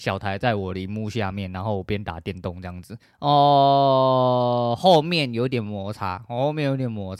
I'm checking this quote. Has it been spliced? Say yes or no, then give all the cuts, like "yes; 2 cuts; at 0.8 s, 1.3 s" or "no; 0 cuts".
yes; 1 cut; at 3.0 s